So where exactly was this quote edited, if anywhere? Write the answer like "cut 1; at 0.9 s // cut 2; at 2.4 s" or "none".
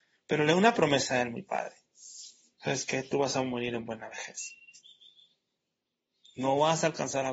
none